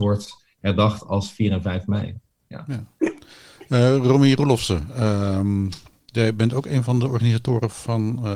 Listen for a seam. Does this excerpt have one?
no; 0 cuts

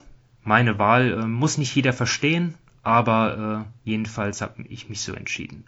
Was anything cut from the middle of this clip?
yes; 1 cut; at 3.8 s

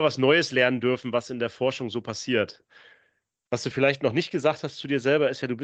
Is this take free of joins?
yes; 0 cuts

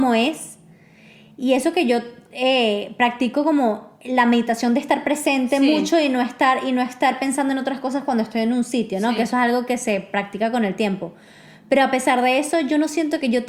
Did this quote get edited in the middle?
no; 0 cuts

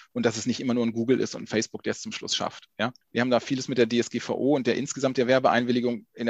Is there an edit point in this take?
yes; 1 cut; at 3.0 s

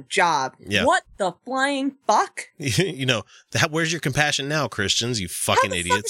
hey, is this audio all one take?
yes; 0 cuts

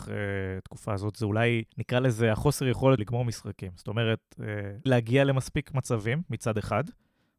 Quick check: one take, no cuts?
no; 3 cuts; at 1.7 s, 3.0 s, 4.9 s

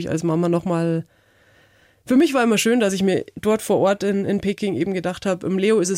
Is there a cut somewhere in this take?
no; 0 cuts

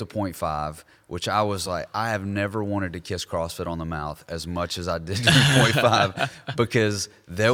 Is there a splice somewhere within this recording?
no; 0 cuts

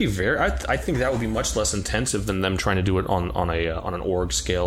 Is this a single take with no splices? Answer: yes; 0 cuts

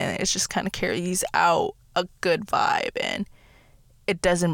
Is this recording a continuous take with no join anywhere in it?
yes; 0 cuts

